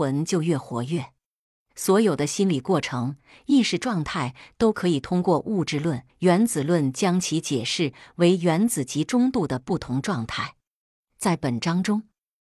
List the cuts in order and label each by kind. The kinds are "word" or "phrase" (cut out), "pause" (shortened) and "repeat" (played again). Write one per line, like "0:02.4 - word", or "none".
0:06.1 - pause